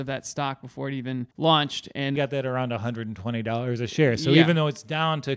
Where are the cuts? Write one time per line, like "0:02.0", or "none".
0:01.3
0:02.2

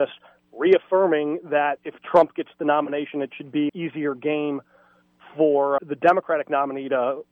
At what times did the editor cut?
0:01.8
0:03.7
0:05.8

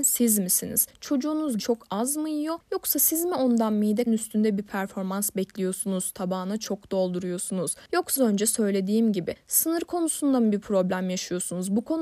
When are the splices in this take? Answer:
0:01.6
0:04.1
0:08.2

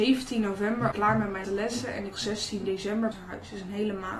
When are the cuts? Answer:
0:00.9
0:01.4
0:02.1
0:03.1

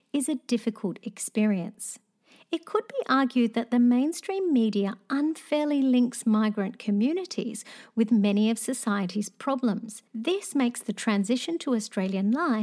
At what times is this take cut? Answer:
0:10.1

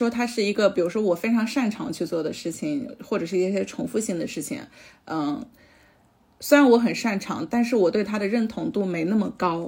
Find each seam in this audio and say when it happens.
none

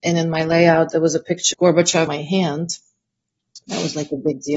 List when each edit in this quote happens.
0:01.5
0:02.1

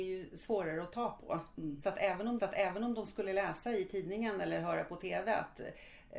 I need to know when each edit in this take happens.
0:02.4

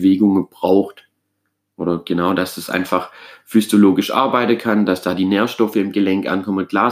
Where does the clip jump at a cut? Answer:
none

